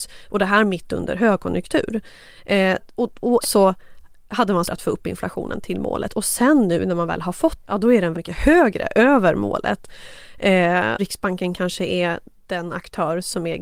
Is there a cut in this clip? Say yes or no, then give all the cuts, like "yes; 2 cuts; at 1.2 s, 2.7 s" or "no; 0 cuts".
yes; 6 cuts; at 2.8 s, 3.4 s, 4.6 s, 7.6 s, 8.1 s, 11.0 s